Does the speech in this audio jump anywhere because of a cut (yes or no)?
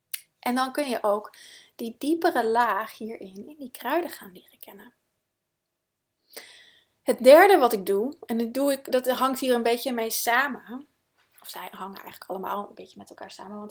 no